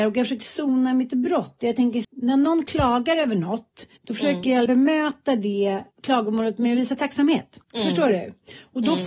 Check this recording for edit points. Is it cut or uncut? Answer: cut